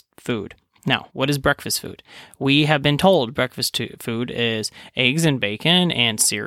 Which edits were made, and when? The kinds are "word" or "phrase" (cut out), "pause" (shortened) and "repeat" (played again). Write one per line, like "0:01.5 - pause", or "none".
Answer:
0:01.1 - pause